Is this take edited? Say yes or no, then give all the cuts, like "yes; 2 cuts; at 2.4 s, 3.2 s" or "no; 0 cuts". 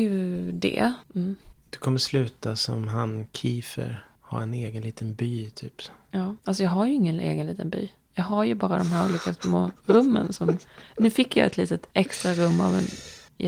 yes; 2 cuts; at 6.4 s, 11.9 s